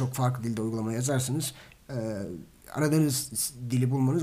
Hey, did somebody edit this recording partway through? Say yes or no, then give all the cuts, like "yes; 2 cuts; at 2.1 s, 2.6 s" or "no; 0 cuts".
no; 0 cuts